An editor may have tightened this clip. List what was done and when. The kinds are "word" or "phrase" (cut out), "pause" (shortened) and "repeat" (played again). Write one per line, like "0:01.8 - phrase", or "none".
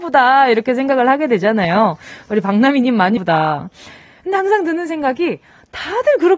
0:03.2 - word